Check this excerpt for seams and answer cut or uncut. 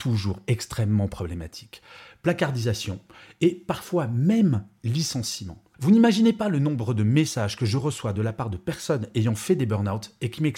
uncut